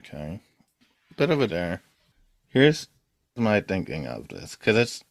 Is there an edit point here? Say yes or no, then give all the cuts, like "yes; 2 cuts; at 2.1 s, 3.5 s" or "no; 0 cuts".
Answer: yes; 2 cuts; at 1.5 s, 3.4 s